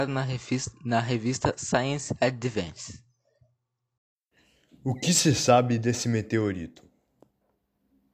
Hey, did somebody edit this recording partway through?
no; 0 cuts

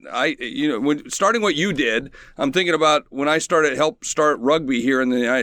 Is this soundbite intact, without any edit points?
yes; 0 cuts

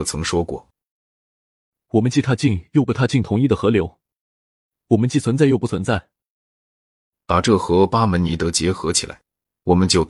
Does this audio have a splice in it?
no; 0 cuts

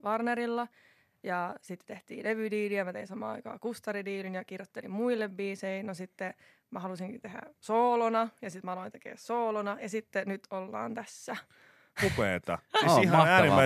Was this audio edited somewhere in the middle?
no; 0 cuts

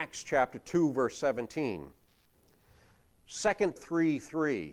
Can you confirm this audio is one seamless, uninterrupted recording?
no; 1 cut; at 3.8 s

